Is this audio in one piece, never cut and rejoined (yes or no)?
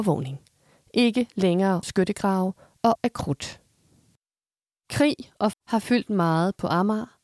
no